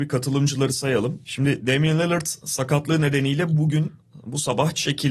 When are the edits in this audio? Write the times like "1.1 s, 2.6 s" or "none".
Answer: none